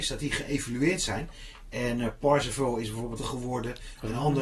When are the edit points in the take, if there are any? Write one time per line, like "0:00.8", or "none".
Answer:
0:03.2